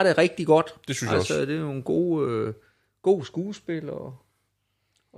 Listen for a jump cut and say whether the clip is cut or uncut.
uncut